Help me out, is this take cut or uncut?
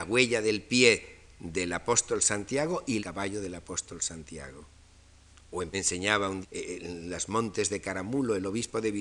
cut